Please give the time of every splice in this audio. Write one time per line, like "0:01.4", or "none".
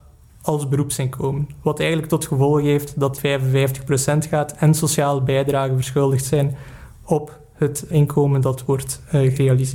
0:03.2
0:07.9